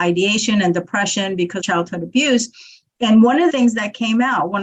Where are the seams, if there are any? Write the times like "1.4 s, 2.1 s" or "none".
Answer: 1.6 s, 3.5 s